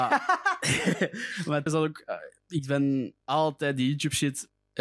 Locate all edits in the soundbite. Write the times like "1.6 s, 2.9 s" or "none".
1.7 s, 3.2 s